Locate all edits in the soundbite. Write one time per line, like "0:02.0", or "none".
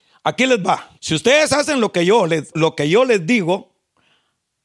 0:01.0
0:02.5